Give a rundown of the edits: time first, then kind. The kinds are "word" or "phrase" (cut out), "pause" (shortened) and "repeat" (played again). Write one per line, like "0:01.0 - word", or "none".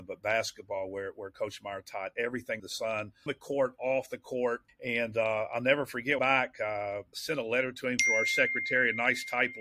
0:02.6 - word
0:03.3 - word
0:04.7 - pause
0:06.2 - phrase
0:07.1 - word